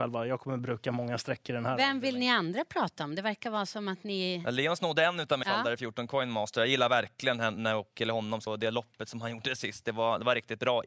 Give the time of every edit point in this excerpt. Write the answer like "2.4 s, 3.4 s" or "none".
5.4 s, 8.5 s